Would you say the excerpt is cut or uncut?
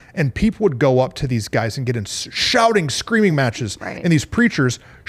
uncut